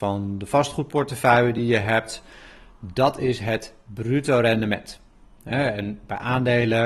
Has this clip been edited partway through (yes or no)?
no